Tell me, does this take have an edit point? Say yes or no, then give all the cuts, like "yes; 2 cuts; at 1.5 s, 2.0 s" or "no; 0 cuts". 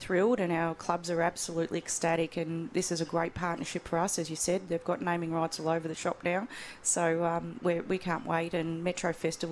no; 0 cuts